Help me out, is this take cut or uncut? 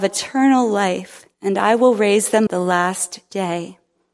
cut